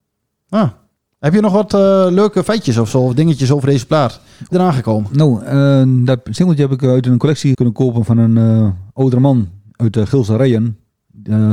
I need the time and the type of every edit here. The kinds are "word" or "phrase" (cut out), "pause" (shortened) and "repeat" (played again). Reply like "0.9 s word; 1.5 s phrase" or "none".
4.5 s phrase; 7.5 s word